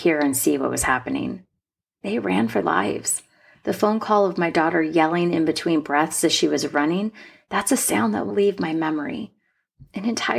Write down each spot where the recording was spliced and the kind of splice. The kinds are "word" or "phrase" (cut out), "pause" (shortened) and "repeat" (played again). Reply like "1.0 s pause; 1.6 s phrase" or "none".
2.6 s word; 8.3 s word